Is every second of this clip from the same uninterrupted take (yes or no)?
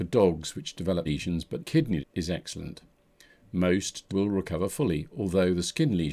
no